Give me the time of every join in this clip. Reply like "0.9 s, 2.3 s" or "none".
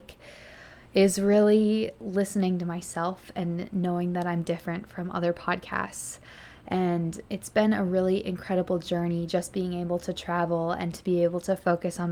7.3 s